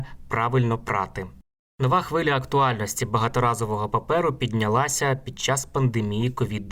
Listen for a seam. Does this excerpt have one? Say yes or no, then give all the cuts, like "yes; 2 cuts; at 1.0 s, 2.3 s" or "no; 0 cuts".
no; 0 cuts